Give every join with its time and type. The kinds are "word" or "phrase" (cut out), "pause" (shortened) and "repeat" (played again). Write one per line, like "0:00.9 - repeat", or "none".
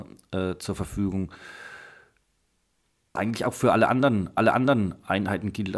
0:03.2 - word
0:04.4 - repeat